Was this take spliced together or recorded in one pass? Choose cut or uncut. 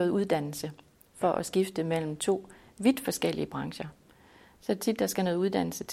uncut